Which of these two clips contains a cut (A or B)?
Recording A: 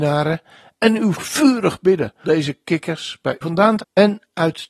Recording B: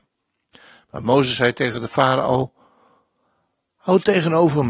A